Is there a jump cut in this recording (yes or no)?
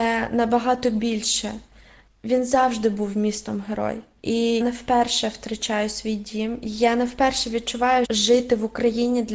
yes